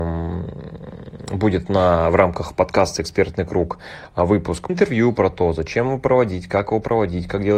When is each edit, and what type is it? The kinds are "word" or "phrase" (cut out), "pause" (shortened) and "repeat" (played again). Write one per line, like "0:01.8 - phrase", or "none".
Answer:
0:04.7 - phrase